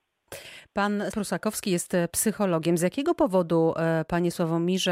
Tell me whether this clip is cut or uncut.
cut